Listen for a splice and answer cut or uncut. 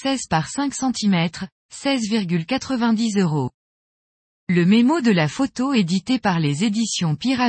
uncut